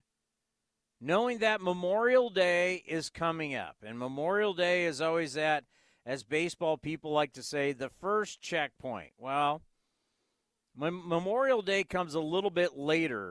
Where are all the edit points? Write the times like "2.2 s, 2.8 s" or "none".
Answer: none